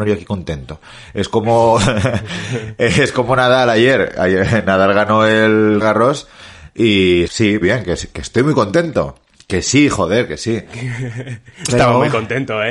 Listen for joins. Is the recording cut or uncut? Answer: cut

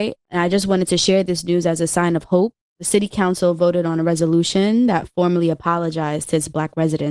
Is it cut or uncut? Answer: uncut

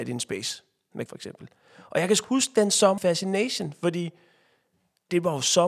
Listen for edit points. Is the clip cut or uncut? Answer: cut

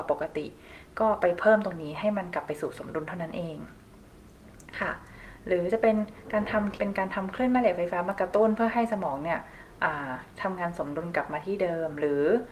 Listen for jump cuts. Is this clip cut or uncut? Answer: cut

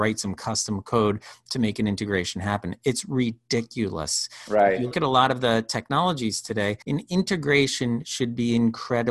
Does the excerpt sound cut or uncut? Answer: cut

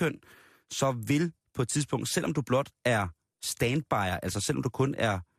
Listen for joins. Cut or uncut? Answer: uncut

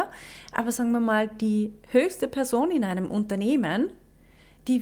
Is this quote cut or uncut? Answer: uncut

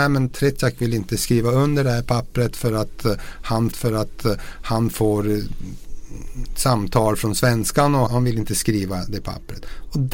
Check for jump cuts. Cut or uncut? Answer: cut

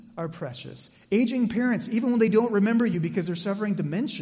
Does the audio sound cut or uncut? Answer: uncut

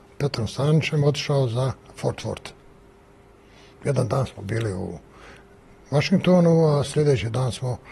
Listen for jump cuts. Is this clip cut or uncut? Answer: uncut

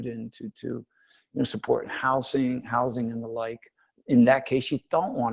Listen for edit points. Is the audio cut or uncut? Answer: uncut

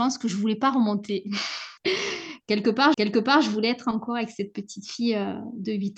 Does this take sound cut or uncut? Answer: cut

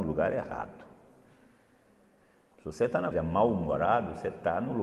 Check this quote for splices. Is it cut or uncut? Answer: cut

